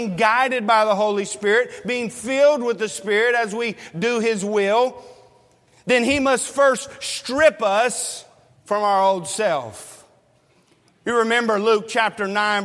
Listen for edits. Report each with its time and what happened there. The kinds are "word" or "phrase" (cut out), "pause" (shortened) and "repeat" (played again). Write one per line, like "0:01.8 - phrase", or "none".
0:08.5 - pause